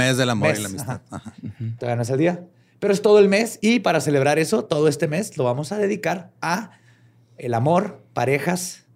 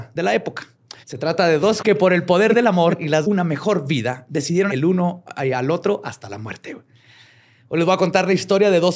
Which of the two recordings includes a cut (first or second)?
second